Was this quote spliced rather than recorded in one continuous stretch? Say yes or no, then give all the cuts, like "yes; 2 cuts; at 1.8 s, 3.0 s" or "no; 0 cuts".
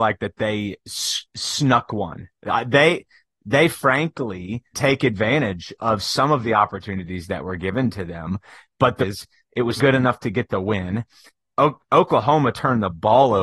yes; 4 cuts; at 4.7 s, 5.7 s, 9.0 s, 9.8 s